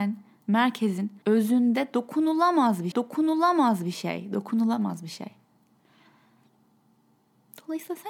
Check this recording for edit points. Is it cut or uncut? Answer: cut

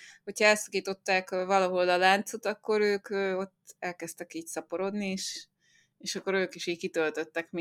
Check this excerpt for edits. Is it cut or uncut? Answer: uncut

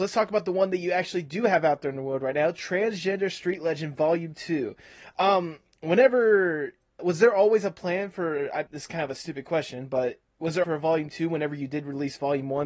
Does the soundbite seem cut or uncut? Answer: cut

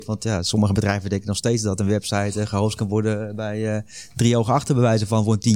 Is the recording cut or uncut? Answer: uncut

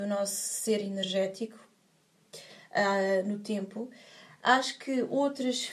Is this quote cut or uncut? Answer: uncut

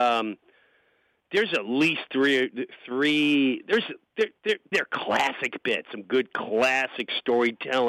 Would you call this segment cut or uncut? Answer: cut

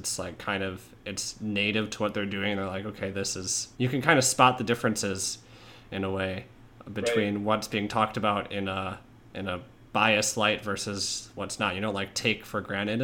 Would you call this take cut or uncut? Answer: cut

